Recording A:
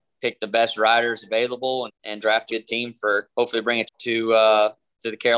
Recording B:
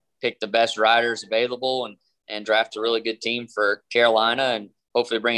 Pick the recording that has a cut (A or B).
A